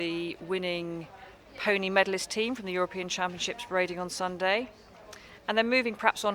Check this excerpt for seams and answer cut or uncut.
cut